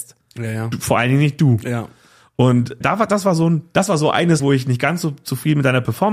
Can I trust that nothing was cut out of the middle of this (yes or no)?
no